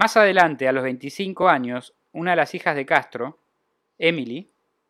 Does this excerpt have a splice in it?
no; 0 cuts

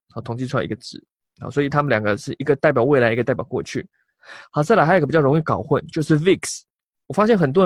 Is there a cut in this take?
no; 0 cuts

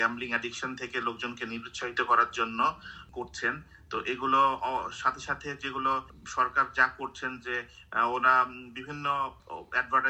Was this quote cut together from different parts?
no; 0 cuts

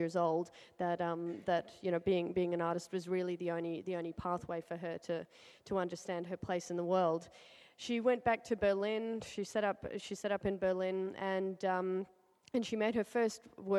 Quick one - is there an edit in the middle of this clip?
no; 0 cuts

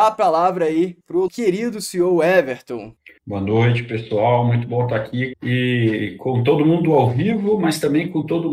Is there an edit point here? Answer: yes; 2 cuts; at 1.3 s, 5.3 s

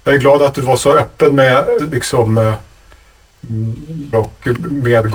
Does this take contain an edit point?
yes; 2 cuts; at 1.8 s, 4.1 s

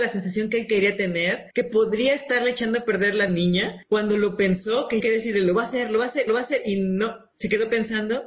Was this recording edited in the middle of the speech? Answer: yes; 4 cuts; at 1.5 s, 3.3 s, 5.0 s, 6.3 s

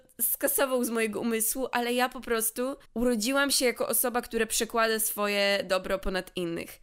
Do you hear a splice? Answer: yes; 1 cut; at 2.9 s

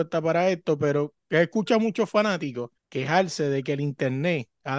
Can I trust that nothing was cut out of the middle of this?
no; 1 cut; at 2.8 s

